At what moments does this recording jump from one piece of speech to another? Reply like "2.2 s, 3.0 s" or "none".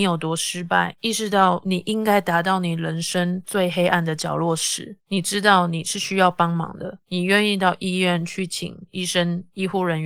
none